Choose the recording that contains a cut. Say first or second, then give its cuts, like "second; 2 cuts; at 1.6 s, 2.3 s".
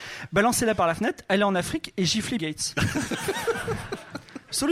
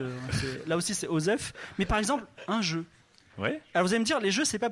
first; 1 cut; at 2.4 s